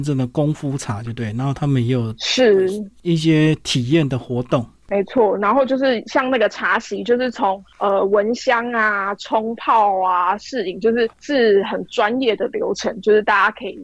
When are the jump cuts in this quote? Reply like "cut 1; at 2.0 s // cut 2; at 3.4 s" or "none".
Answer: cut 1; at 11.1 s